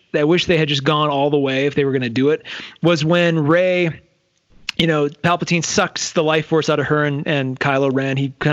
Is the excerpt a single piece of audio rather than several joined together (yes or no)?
yes